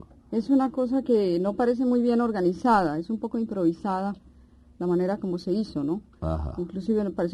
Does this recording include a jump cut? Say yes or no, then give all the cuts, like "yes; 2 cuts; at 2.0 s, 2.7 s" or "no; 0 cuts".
no; 0 cuts